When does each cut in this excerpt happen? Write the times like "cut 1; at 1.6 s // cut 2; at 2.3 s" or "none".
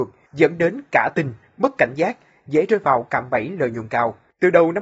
none